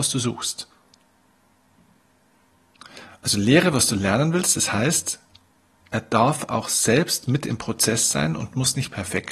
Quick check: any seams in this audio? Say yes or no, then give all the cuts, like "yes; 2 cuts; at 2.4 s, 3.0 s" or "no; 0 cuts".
no; 0 cuts